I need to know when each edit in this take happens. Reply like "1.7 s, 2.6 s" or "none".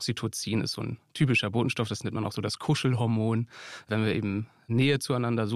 none